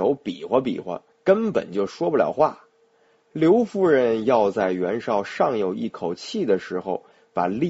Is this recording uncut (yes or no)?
no